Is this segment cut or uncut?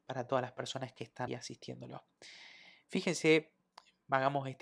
cut